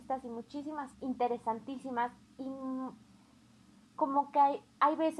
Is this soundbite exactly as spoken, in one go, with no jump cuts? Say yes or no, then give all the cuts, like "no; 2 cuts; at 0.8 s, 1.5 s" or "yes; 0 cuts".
no; 1 cut; at 0.9 s